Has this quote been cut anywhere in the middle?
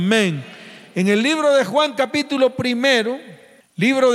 no; 0 cuts

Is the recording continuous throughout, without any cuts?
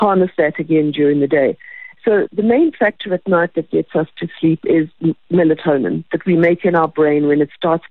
no; 1 cut; at 2.3 s

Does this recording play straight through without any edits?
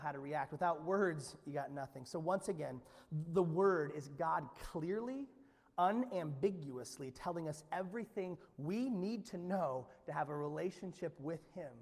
yes; 0 cuts

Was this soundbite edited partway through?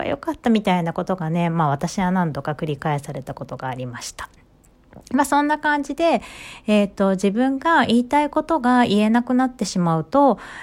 no; 0 cuts

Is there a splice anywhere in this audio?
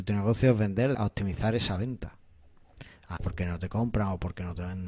yes; 2 cuts; at 0.9 s, 3.2 s

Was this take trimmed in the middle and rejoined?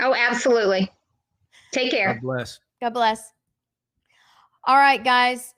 no; 0 cuts

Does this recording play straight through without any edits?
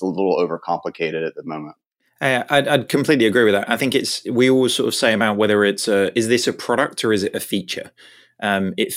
yes; 0 cuts

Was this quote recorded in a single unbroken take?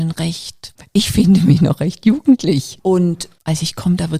yes; 0 cuts

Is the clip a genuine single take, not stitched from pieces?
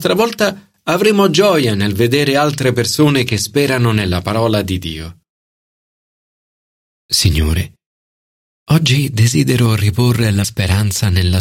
no; 1 cut; at 10.4 s

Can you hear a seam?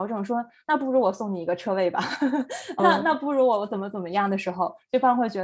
yes; 1 cut; at 2.8 s

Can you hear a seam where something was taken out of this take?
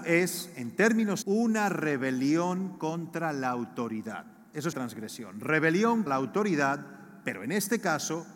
yes; 3 cuts; at 1.2 s, 4.7 s, 6.1 s

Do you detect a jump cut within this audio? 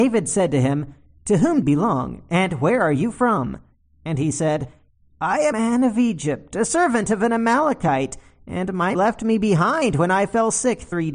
yes; 3 cuts; at 1.6 s, 5.5 s, 8.9 s

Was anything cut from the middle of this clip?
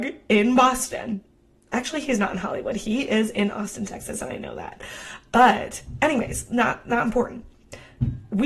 no; 0 cuts

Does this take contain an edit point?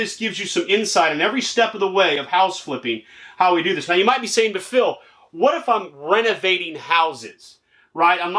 no; 0 cuts

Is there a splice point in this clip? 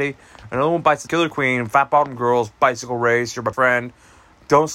yes; 2 cuts; at 1.1 s, 3.5 s

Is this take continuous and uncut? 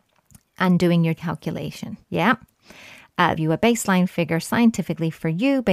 no; 3 cuts; at 1.2 s, 2.0 s, 3.4 s

